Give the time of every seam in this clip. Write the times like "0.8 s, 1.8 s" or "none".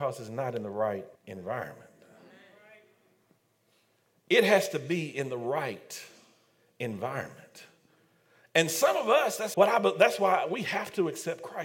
1.2 s, 9.5 s